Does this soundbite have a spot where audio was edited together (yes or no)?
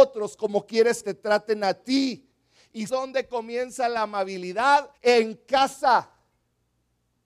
yes